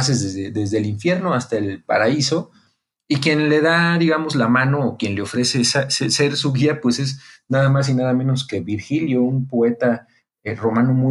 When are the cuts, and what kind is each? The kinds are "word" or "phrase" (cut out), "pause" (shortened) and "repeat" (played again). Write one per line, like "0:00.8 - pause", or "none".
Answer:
none